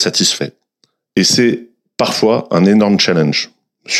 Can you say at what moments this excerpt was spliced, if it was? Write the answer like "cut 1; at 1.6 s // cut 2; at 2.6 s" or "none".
none